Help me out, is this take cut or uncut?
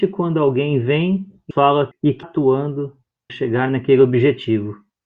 cut